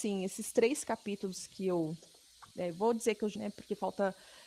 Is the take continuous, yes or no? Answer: no